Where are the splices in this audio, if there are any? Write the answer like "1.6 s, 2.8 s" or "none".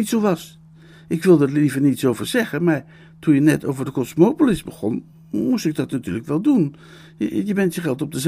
none

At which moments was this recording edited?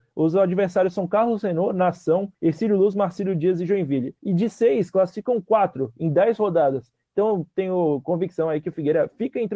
2.3 s, 4.2 s

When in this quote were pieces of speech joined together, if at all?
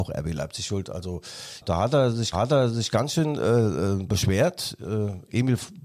1.6 s, 2.3 s

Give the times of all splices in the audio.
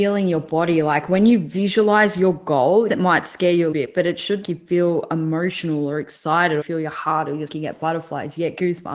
2.9 s, 3.7 s, 4.4 s, 6.6 s, 7.5 s

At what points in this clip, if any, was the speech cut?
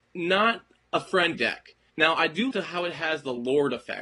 1.3 s, 2.5 s

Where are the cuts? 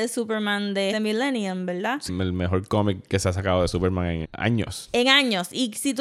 0.9 s, 2.1 s, 4.2 s

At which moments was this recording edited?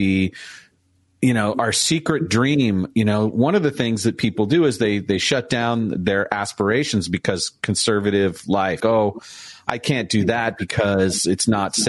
8.8 s

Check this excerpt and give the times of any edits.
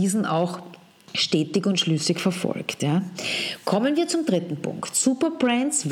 none

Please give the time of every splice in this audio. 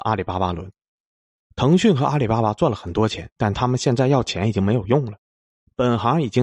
3.3 s

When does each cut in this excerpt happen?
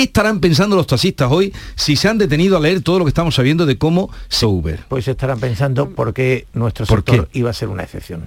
4.4 s

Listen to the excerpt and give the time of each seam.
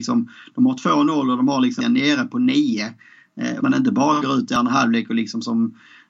1.8 s, 3.6 s

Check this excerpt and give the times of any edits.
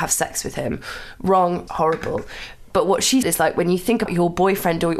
1.7 s, 3.2 s, 4.1 s

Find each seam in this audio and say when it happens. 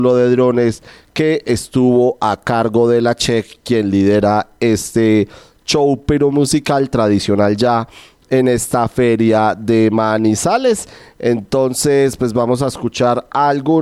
none

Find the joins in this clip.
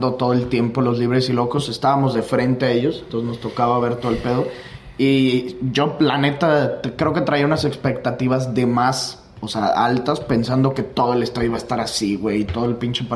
none

